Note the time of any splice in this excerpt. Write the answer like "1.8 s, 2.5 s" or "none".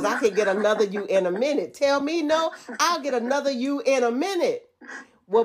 none